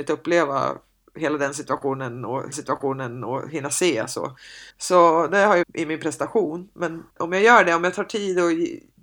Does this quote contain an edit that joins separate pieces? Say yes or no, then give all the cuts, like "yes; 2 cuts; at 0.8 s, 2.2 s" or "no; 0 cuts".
yes; 4 cuts; at 2.5 s, 4.7 s, 5.6 s, 7.1 s